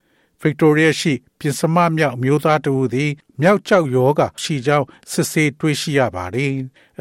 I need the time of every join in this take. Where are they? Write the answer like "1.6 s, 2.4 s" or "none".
4.4 s